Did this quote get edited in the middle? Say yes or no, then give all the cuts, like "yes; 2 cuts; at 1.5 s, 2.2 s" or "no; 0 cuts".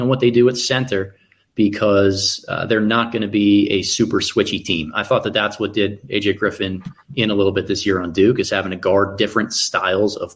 no; 0 cuts